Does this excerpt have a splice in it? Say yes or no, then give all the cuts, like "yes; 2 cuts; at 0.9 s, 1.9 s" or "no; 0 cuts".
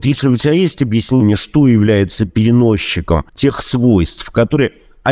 yes; 1 cut; at 3.3 s